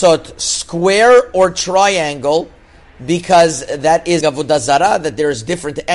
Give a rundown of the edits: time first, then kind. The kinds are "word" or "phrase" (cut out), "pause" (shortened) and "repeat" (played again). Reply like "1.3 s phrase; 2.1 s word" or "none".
4.2 s word